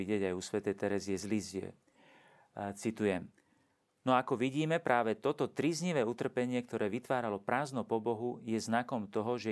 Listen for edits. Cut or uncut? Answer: uncut